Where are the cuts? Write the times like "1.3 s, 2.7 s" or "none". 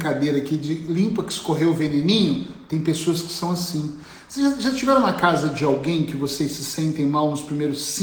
none